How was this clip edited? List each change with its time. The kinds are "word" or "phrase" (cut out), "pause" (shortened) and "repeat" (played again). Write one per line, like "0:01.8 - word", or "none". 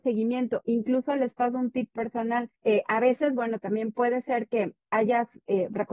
0:02.6 - pause